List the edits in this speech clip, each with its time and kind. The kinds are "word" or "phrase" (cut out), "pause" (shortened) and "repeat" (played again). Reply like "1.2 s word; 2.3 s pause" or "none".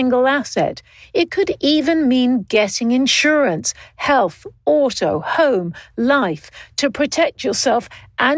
none